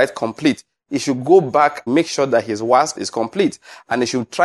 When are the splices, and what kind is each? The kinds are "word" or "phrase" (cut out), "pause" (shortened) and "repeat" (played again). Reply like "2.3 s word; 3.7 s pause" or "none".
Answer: 1.9 s word; 3.0 s word